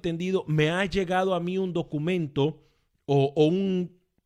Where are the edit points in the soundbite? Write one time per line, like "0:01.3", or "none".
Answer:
none

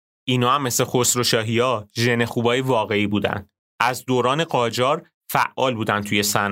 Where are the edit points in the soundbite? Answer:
none

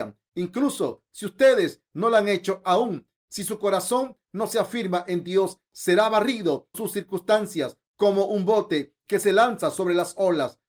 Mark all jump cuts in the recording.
0:06.7

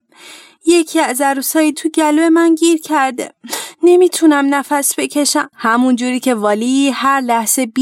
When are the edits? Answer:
0:01.7
0:05.5

